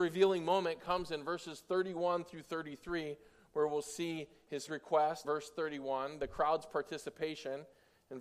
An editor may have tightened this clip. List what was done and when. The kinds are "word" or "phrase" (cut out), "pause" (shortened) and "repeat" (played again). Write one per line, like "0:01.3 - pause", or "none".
0:04.7 - word
0:05.2 - word

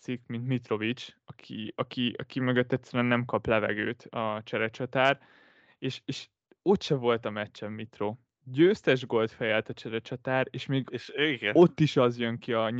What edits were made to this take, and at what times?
none

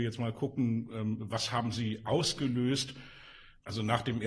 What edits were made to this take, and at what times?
none

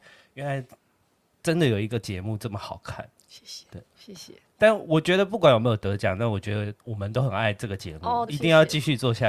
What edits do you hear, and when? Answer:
0:03.9 - pause
0:06.8 - pause
0:08.3 - phrase

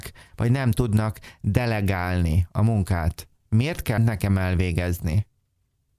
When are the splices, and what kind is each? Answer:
0:04.0 - word

